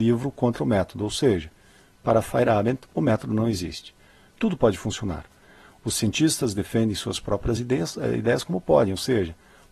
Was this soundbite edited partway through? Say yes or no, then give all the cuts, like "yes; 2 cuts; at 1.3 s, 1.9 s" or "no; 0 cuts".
no; 0 cuts